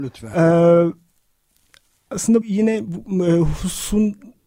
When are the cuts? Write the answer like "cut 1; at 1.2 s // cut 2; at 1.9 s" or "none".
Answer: cut 1; at 2.4 s